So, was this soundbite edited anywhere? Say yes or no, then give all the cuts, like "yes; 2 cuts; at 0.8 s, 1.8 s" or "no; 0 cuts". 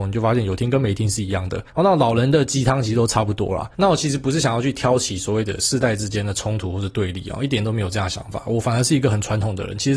yes; 2 cuts; at 1.7 s, 3.7 s